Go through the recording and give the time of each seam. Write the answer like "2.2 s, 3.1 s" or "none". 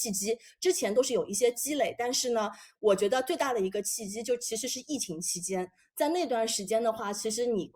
none